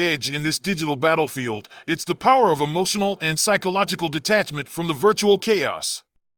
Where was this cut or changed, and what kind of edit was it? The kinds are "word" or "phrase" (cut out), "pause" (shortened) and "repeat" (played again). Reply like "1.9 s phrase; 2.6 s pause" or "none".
none